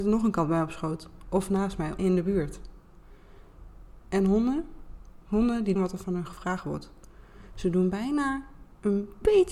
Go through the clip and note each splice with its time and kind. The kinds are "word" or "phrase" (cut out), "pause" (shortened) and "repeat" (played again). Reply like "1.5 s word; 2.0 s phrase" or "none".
2.0 s phrase; 4.0 s pause; 5.8 s word

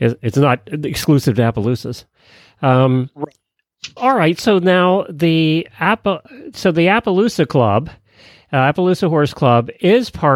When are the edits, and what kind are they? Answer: 4.0 s word

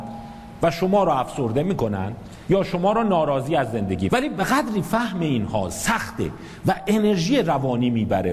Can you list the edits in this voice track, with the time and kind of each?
4.1 s word

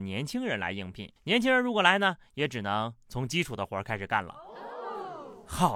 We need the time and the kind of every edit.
1.2 s pause

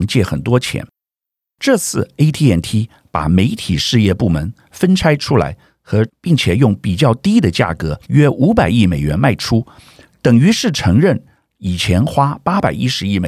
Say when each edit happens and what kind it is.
6.1 s phrase; 8.0 s pause

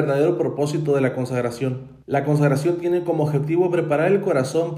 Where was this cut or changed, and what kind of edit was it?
2.0 s pause

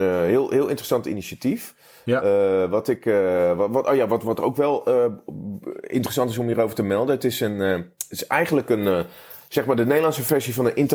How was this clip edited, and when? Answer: none

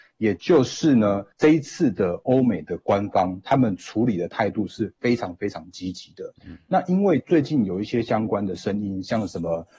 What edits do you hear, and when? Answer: 1.3 s pause; 6.4 s pause

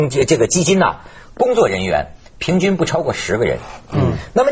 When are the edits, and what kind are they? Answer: none

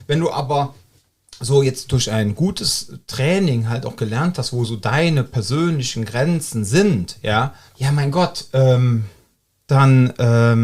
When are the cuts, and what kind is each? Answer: 7.7 s pause

